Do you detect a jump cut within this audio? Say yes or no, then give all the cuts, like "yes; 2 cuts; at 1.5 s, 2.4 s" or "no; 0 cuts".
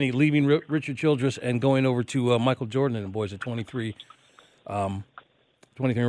no; 0 cuts